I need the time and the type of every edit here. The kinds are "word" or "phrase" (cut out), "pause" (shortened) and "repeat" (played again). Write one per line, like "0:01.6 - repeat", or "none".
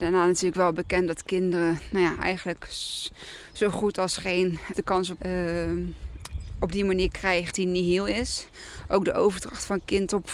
0:04.7 - word
0:05.2 - word
0:07.5 - word